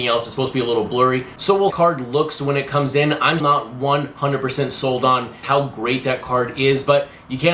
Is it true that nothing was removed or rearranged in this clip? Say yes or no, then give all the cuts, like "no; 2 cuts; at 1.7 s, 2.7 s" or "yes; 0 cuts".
no; 3 cuts; at 1.7 s, 3.4 s, 5.4 s